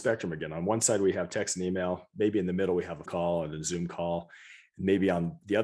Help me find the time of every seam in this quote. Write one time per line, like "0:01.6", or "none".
0:03.1